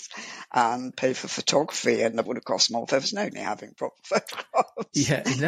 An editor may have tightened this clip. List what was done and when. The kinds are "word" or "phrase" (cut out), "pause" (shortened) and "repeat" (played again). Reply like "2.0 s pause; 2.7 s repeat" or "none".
0.9 s word; 2.3 s word; 3.3 s phrase